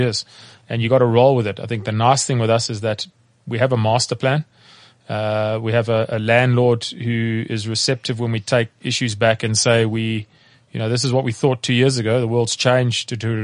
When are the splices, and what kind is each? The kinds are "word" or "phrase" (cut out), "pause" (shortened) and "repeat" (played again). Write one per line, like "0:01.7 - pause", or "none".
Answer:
none